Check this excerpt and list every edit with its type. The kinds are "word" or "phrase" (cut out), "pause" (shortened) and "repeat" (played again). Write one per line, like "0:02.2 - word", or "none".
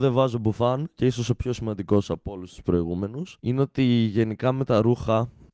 0:03.4 - pause